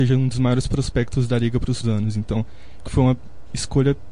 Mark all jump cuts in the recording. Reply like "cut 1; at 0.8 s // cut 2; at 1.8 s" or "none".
cut 1; at 1.8 s // cut 2; at 2.8 s